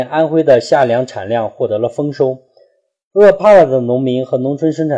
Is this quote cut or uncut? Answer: uncut